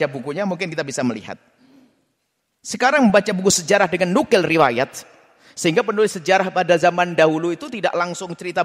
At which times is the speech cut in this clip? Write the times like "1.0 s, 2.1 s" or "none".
none